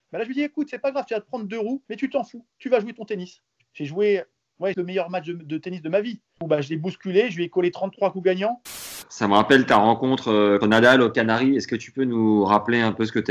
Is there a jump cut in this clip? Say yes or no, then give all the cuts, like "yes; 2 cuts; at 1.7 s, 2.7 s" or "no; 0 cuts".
yes; 2 cuts; at 4.7 s, 10.6 s